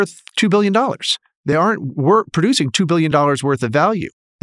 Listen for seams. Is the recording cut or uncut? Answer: uncut